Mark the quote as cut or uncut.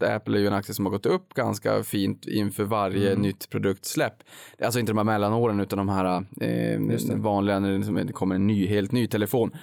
uncut